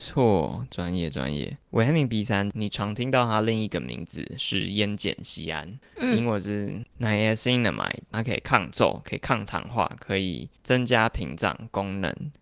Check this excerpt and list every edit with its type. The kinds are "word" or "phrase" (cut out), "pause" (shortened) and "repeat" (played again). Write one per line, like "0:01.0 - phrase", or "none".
0:10.6 - pause

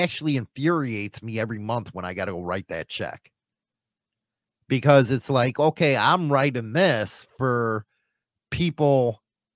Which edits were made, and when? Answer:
none

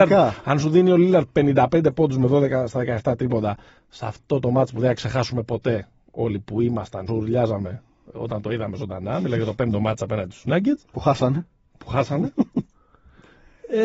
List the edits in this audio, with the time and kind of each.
0:07.1 - phrase

